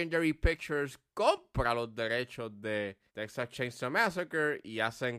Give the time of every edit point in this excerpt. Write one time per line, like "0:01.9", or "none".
0:03.1